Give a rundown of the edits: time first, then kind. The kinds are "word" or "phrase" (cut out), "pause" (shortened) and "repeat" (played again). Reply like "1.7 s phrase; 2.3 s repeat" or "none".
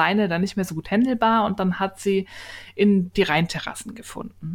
3.1 s word